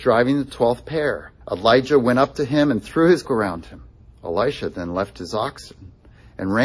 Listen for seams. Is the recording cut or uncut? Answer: cut